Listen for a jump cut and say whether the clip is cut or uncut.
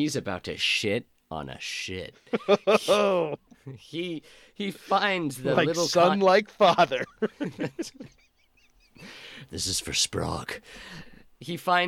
uncut